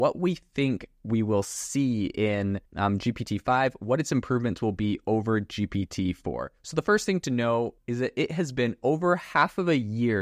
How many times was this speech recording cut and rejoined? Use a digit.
2